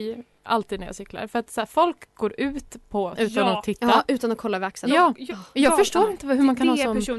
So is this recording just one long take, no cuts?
no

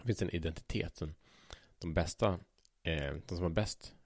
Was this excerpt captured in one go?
yes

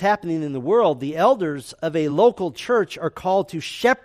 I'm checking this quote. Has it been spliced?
no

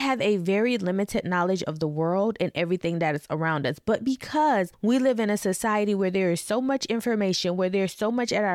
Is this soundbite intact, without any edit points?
yes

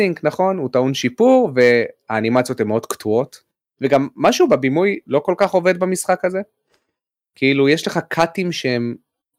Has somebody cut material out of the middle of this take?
no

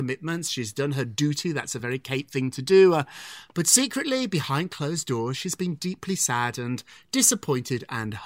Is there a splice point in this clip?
no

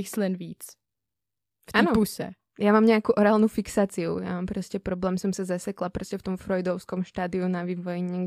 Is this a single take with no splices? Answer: yes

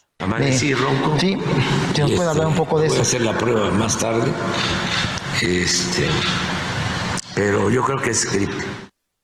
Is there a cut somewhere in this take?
no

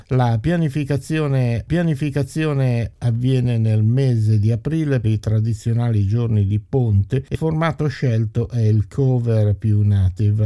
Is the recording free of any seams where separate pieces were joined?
no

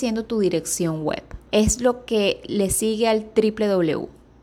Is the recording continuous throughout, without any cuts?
no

